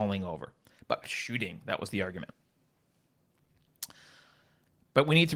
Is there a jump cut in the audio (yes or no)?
yes